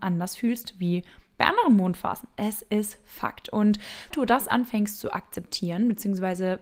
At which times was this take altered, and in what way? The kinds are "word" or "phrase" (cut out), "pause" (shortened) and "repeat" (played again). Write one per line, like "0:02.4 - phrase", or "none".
0:04.1 - phrase